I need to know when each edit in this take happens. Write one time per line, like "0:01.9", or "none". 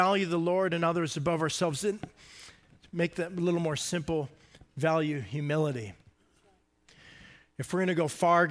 none